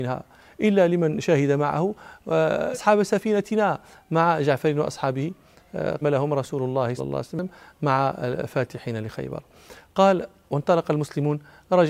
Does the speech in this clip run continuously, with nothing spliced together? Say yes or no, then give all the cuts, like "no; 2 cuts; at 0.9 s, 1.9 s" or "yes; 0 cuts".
no; 3 cuts; at 2.7 s, 6.0 s, 7.0 s